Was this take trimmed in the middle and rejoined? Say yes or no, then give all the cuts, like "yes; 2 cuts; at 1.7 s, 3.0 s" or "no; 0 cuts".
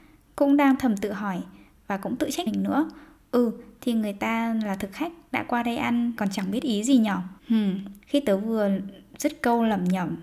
yes; 4 cuts; at 2.5 s, 6.2 s, 7.4 s, 8.0 s